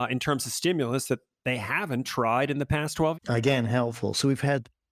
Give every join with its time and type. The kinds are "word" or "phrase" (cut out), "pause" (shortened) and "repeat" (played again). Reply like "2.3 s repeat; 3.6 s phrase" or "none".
3.1 s word